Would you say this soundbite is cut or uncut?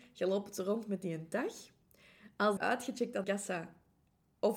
cut